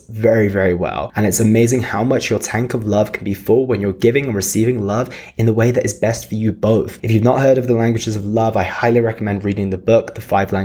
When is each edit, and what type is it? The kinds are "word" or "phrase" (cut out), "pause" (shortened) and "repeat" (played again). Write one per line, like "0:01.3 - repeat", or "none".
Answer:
none